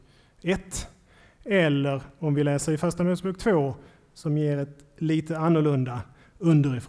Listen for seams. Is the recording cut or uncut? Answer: uncut